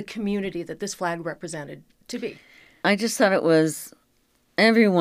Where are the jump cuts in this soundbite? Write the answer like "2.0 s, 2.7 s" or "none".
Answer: none